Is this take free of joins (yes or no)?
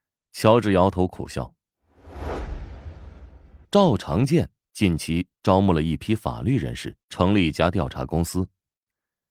no